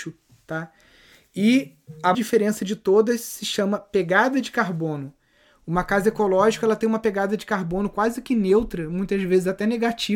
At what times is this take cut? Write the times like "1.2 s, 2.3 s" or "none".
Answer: 2.1 s